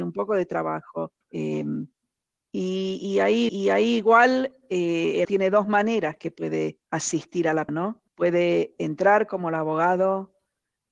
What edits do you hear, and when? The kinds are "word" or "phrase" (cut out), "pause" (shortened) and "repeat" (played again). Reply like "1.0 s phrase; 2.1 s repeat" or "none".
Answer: 1.2 s pause; 3.5 s repeat; 5.2 s word; 6.8 s pause; 7.7 s word; 8.1 s pause